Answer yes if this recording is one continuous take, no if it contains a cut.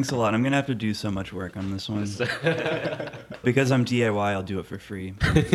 no